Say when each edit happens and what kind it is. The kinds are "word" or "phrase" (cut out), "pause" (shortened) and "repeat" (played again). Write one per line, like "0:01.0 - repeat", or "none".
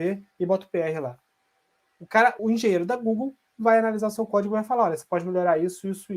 0:02.4 - word

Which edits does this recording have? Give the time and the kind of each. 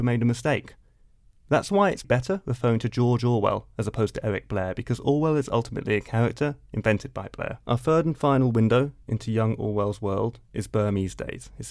0:02.0 - word
0:07.6 - pause

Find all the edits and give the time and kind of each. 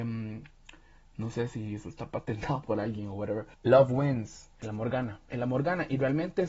0:03.5 - pause
0:04.5 - pause
0:05.3 - pause

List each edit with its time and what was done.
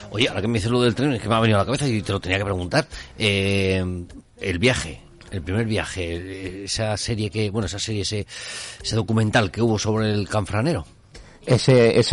none

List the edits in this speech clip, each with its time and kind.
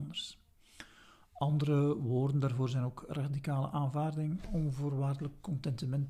none

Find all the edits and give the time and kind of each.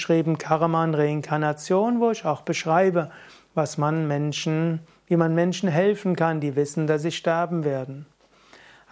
none

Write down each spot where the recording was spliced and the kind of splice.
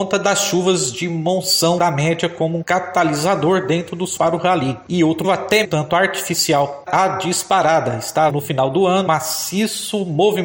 0:01.8 - word
0:02.6 - word
0:04.2 - word
0:05.2 - word
0:05.6 - word
0:06.9 - word
0:08.3 - word
0:09.1 - word

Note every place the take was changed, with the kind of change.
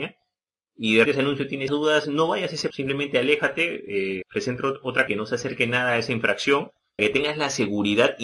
0:01.1 - word
0:01.7 - word
0:02.0 - word
0:02.7 - word
0:04.2 - word
0:05.1 - word
0:07.0 - word

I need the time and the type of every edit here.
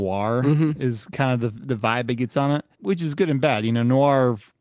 0:02.7 - pause

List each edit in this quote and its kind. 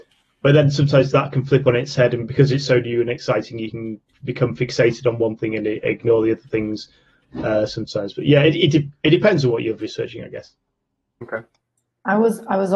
none

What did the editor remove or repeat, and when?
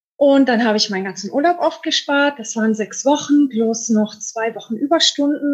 none

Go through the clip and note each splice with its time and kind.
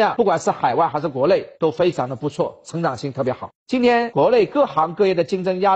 0:01.5 - pause
0:03.6 - pause

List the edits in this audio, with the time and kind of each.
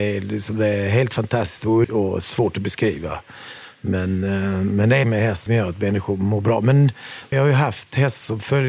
0:01.8 - word
0:05.0 - word
0:05.5 - word
0:07.3 - word

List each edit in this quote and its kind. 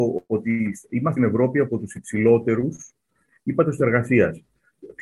0:01.2 - phrase
0:03.8 - word

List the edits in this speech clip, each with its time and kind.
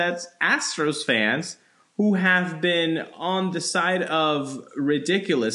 none

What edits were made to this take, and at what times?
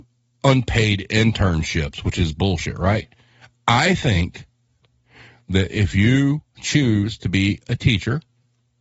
none

